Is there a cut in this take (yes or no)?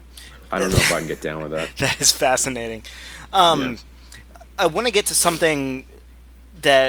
no